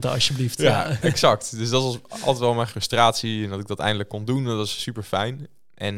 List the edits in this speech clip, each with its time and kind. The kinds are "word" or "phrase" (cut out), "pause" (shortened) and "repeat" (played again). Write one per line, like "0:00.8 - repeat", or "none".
0:02.7 - word